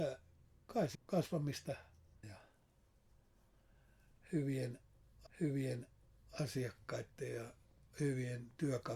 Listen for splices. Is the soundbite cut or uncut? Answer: cut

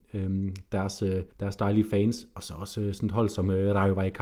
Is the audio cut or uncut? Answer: cut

